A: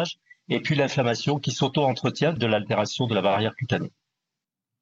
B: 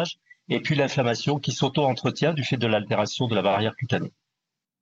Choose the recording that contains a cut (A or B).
A